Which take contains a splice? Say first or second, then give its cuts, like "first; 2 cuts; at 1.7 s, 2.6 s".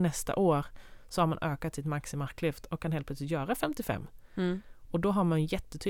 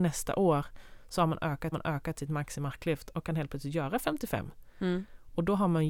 second; 1 cut; at 1.7 s